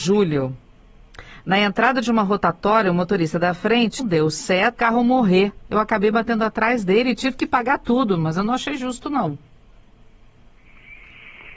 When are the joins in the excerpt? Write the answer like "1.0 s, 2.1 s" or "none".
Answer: 4.0 s, 4.7 s